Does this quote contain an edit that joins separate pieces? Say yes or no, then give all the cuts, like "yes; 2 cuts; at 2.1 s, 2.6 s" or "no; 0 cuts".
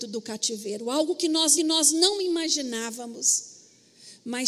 yes; 1 cut; at 1.6 s